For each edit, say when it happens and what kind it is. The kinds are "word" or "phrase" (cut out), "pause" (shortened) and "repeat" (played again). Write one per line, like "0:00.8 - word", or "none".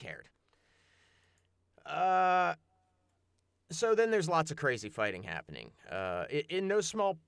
none